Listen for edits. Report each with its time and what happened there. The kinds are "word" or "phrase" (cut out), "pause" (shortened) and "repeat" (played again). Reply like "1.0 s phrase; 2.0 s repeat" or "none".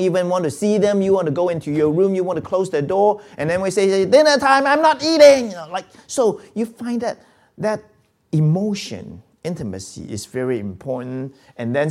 none